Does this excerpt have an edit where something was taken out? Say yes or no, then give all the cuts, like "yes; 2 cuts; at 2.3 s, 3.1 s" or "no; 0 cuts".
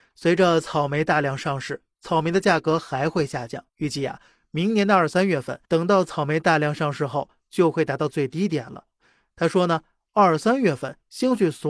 yes; 2 cuts; at 3.7 s, 5.6 s